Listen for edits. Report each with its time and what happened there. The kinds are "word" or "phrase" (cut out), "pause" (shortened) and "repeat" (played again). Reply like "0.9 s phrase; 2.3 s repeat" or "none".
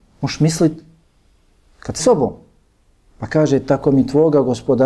2.0 s word